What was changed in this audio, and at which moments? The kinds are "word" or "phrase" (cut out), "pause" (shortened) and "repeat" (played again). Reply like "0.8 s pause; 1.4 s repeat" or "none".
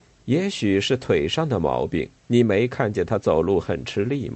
2.2 s pause